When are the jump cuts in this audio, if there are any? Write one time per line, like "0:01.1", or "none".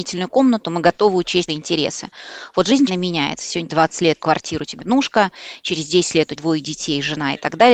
0:01.5
0:02.9
0:03.7
0:04.2
0:04.8
0:06.4

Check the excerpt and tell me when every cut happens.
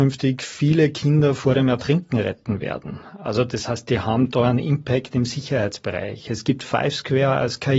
none

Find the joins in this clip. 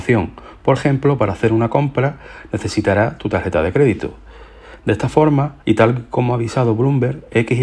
0:05.6

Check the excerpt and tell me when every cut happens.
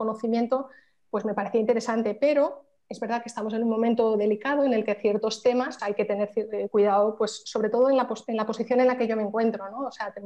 0:05.8

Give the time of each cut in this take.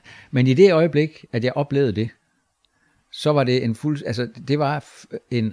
none

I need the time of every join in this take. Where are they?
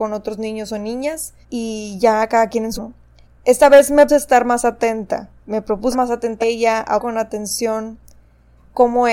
0:01.4
0:02.8
0:03.2
0:04.1
0:05.4
0:05.9
0:06.4
0:07.0

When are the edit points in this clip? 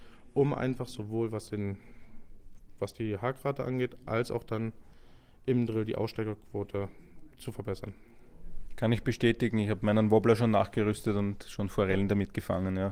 none

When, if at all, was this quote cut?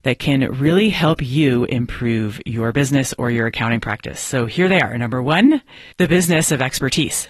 0:05.9

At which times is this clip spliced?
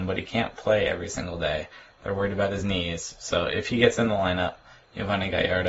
none

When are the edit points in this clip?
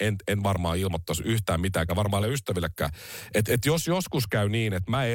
0:01.9
0:02.2

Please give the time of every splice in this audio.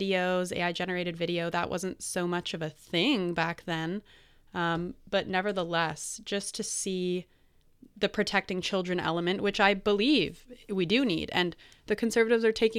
none

